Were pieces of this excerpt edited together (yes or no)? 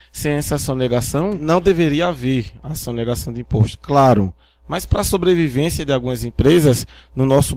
no